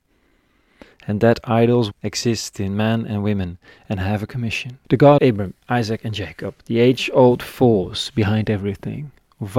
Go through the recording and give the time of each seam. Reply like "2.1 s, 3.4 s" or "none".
1.9 s, 4.8 s, 5.2 s